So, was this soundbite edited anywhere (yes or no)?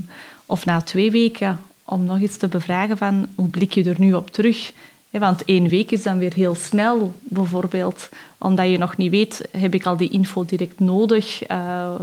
no